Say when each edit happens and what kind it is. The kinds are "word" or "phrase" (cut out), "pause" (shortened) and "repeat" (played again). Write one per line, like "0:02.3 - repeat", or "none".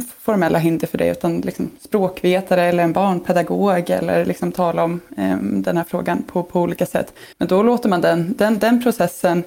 0:07.3 - pause